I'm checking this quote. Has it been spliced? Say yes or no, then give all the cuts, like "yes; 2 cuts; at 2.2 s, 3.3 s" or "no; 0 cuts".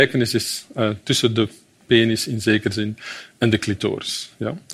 no; 0 cuts